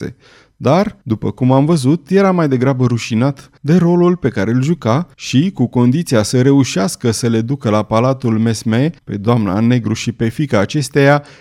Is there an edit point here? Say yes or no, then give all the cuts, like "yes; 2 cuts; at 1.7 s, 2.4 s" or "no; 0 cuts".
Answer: yes; 4 cuts; at 1.0 s, 3.6 s, 5.1 s, 9.0 s